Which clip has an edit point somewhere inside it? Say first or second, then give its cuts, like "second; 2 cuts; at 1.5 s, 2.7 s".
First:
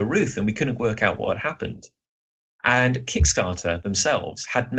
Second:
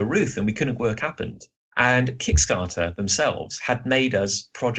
second; 2 cuts; at 1.0 s, 1.5 s